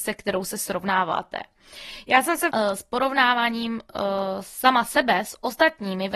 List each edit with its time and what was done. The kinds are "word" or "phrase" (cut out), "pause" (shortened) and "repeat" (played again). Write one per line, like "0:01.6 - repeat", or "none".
0:02.5 - phrase